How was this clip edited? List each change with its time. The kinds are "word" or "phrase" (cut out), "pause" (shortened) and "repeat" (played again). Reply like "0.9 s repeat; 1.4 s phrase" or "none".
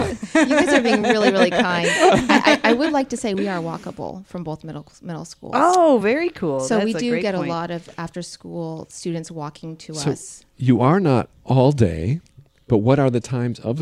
none